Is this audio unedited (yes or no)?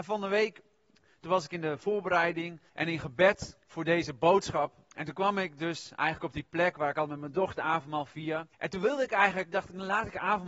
no